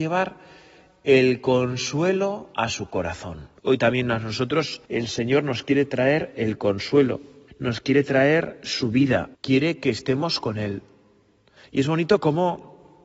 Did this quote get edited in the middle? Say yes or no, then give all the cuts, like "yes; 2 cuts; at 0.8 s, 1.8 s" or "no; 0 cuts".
yes; 4 cuts; at 3.6 s, 4.8 s, 7.5 s, 9.3 s